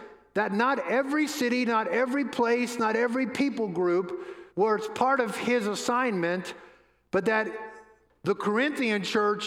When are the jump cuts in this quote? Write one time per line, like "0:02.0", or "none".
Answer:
0:04.5